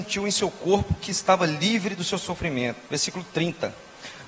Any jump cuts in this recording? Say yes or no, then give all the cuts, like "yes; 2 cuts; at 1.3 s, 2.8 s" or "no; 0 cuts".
yes; 1 cut; at 2.8 s